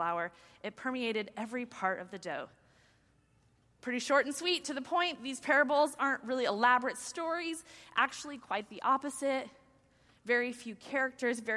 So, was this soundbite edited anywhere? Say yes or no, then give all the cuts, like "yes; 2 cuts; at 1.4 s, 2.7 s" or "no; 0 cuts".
no; 0 cuts